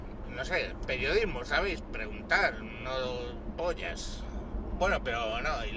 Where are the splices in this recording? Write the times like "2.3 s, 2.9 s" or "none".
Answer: 3.5 s